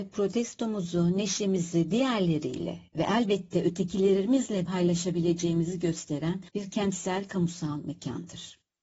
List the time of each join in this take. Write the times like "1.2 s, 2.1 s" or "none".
4.7 s, 6.5 s